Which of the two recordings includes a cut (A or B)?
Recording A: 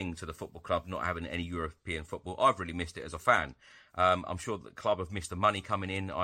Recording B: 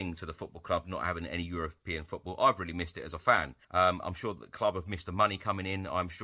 B